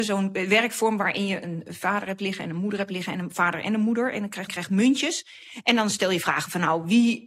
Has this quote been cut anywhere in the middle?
yes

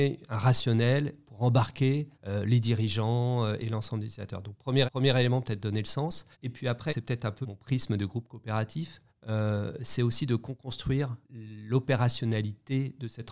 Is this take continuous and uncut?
no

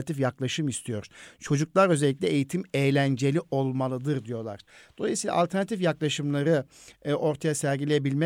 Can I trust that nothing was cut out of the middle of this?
yes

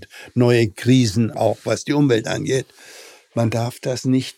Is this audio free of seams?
no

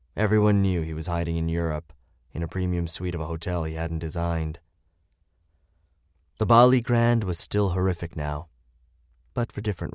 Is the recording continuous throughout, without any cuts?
yes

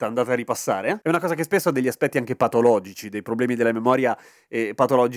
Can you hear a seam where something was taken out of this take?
no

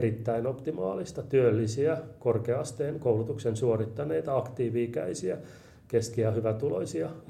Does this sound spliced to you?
no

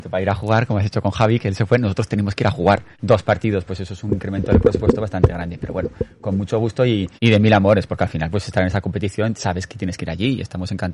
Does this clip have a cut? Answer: yes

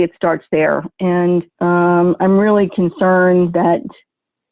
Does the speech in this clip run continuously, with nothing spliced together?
no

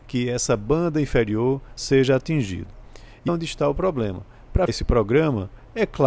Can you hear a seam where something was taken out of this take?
yes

